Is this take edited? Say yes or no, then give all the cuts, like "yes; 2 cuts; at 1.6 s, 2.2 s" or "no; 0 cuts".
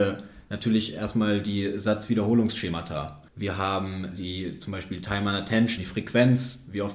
yes; 3 cuts; at 3.3 s, 4.1 s, 5.8 s